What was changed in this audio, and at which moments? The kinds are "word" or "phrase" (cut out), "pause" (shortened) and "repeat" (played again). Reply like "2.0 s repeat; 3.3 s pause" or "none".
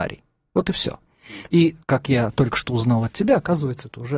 1.8 s pause